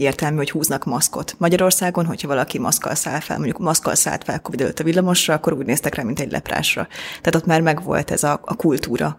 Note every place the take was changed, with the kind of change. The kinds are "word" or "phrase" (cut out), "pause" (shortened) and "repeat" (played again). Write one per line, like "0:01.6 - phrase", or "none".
none